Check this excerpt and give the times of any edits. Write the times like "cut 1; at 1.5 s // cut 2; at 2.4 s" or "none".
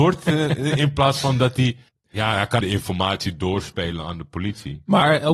cut 1; at 1.9 s // cut 2; at 2.6 s